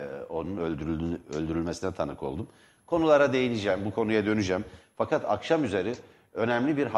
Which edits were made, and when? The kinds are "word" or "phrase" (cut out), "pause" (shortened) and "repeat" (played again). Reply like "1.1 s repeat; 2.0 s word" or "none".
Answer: none